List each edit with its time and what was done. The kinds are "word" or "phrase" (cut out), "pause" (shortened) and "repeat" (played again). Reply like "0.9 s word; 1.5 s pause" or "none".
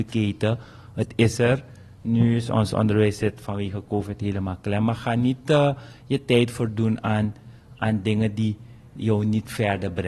none